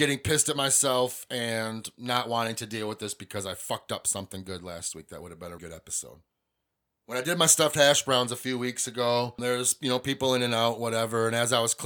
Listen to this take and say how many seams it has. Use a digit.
1